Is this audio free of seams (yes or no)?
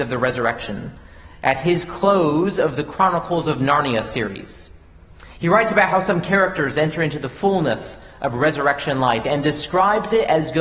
yes